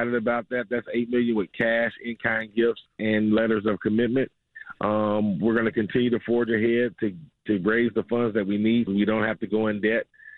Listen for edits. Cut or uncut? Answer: cut